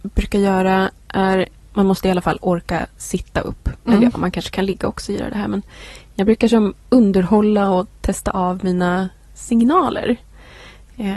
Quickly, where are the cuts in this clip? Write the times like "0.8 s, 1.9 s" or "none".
none